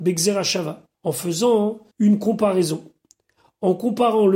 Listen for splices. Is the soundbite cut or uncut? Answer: cut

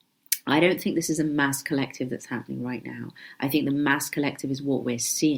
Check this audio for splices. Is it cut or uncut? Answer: uncut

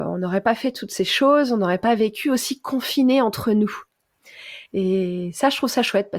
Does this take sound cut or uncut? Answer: cut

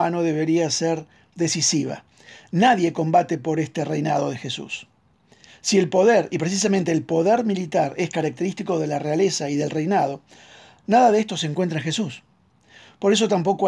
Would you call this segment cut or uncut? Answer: uncut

